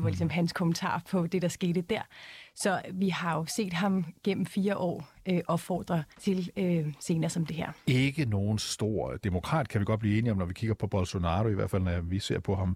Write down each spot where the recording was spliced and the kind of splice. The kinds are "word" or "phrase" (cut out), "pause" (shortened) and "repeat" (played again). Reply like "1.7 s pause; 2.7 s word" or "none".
6.1 s pause